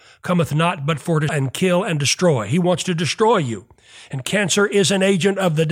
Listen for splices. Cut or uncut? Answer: cut